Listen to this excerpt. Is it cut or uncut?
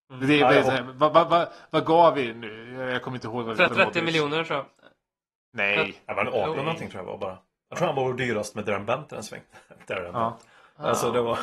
cut